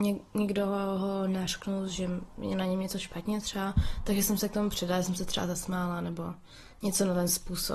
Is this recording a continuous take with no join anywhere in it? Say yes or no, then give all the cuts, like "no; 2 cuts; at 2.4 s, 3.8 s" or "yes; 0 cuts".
yes; 0 cuts